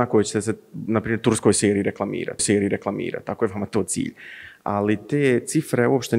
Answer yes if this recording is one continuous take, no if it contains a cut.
no